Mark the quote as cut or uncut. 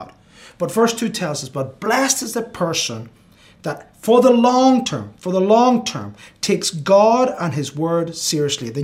uncut